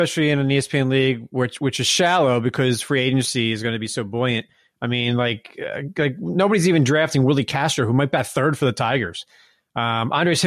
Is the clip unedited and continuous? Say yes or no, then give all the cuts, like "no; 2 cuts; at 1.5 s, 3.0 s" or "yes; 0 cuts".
yes; 0 cuts